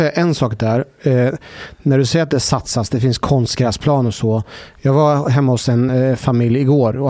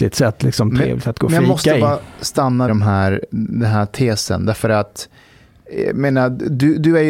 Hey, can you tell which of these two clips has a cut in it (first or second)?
second